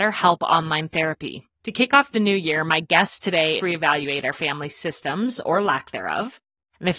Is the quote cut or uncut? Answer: cut